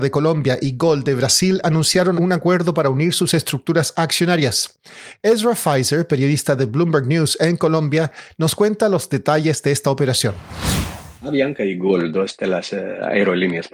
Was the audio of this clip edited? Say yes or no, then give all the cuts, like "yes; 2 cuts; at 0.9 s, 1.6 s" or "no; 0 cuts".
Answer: yes; 2 cuts; at 2.2 s, 11.2 s